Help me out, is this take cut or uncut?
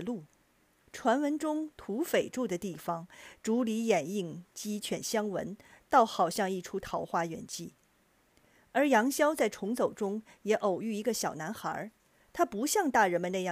uncut